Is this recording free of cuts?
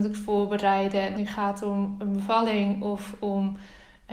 no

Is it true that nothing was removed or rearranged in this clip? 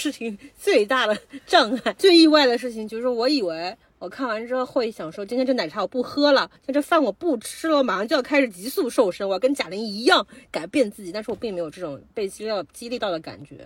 no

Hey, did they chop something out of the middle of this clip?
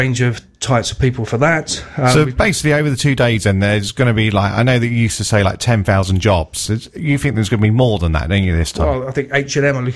no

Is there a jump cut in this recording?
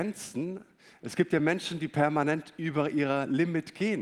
no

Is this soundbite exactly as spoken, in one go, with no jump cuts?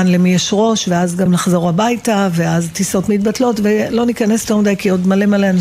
no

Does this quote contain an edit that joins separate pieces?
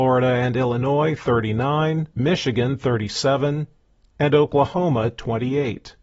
yes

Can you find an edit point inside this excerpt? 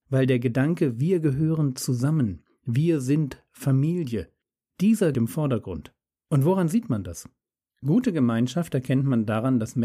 yes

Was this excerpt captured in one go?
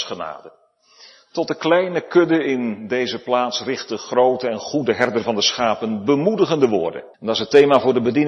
no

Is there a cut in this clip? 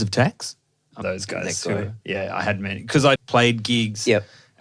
yes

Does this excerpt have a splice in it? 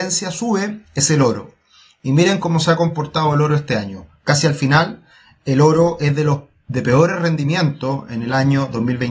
no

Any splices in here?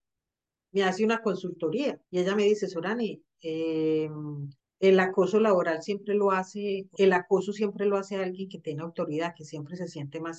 yes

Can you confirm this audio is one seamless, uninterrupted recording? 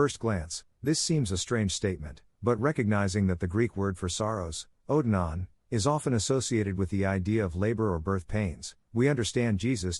yes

